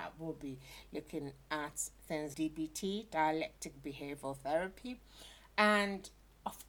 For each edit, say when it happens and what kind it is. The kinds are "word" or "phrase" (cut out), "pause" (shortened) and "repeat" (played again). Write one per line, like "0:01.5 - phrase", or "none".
0:02.3 - word